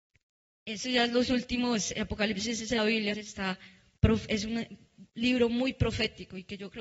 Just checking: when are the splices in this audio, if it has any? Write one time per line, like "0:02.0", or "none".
0:02.8
0:03.1